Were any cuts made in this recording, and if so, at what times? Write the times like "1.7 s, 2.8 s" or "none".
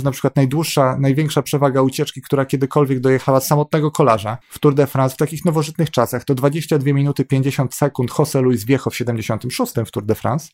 4.4 s

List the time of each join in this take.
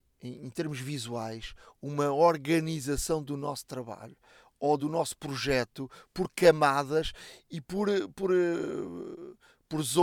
none

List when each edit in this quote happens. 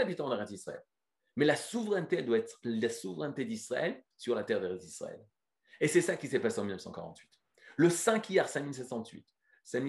none

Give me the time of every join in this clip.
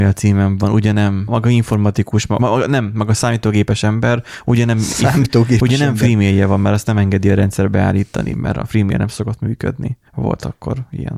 1.3 s, 2.4 s, 10.1 s

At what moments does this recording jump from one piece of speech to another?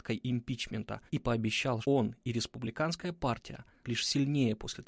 1.1 s, 1.8 s, 3.8 s

